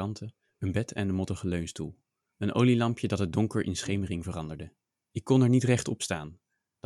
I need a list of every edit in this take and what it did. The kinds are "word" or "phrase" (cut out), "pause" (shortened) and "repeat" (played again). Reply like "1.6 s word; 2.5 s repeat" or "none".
none